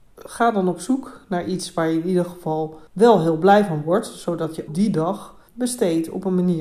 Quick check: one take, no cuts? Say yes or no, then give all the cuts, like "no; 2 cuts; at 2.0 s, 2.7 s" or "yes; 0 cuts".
no; 3 cuts; at 2.9 s, 4.7 s, 5.5 s